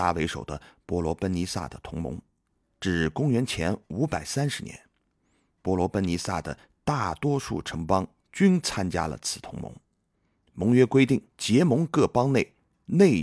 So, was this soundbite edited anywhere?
yes; 1 cut; at 11.3 s

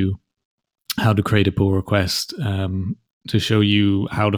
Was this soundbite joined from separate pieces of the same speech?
no; 0 cuts

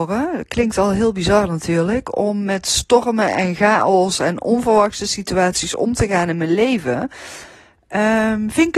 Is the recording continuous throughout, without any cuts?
yes; 0 cuts

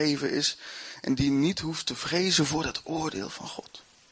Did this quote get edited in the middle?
no; 0 cuts

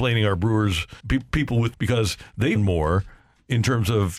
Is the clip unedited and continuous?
no; 3 cuts; at 1.0 s, 1.7 s, 2.6 s

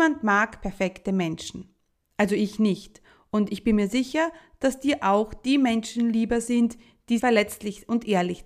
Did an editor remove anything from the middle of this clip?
yes; 1 cut; at 7.2 s

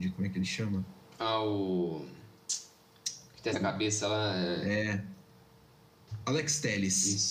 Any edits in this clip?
yes; 1 cut; at 3.5 s

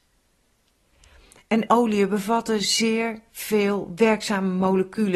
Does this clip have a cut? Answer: yes; 1 cut; at 1.7 s

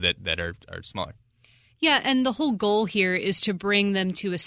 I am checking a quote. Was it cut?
no; 0 cuts

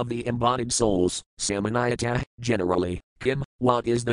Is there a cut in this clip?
no; 0 cuts

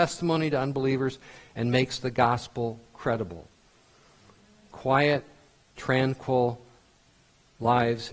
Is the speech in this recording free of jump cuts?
yes; 0 cuts

